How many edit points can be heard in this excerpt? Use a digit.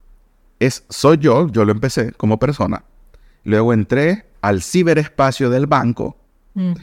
0